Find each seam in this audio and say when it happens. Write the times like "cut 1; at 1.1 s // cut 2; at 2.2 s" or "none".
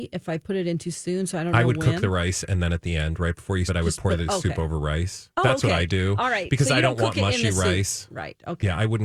cut 1; at 3.7 s